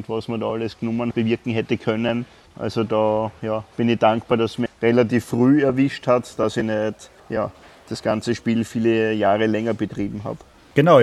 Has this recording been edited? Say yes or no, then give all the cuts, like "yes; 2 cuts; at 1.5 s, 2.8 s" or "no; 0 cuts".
yes; 4 cuts; at 1.1 s, 2.5 s, 4.7 s, 7.2 s